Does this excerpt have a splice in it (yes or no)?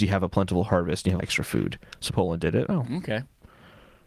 yes